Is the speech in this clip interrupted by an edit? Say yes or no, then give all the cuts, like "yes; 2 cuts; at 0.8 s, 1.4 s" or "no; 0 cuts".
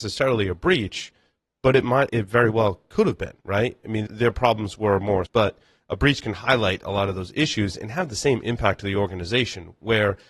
yes; 4 cuts; at 2.1 s, 3.4 s, 4.1 s, 5.3 s